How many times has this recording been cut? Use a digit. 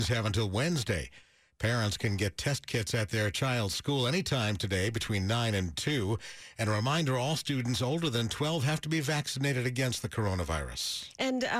0